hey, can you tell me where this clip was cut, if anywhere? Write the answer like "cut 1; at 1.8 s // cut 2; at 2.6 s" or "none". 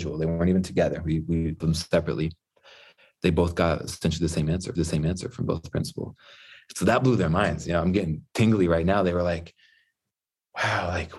cut 1; at 1.6 s // cut 2; at 4.8 s